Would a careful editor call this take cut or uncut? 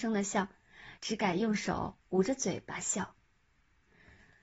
cut